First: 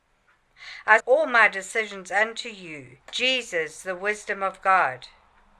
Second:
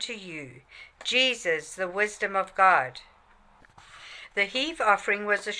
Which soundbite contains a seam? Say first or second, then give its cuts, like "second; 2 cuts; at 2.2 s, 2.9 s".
first; 2 cuts; at 1.0 s, 3.0 s